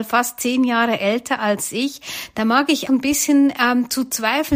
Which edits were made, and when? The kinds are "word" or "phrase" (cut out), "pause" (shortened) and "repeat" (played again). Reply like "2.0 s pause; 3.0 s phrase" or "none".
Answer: 2.9 s word